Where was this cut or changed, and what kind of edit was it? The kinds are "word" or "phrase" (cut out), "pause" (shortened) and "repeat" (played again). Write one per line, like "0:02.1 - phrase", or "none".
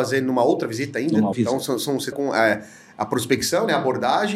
0:01.3 - word
0:02.1 - word